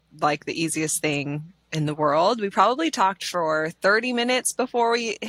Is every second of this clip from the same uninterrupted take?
yes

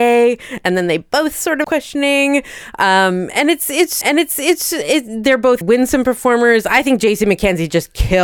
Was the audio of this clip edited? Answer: yes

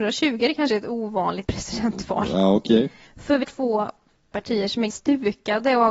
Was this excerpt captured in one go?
no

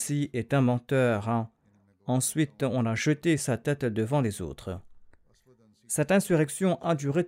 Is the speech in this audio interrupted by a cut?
no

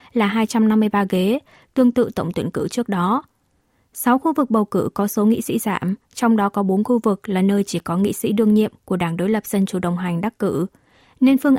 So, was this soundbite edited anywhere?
no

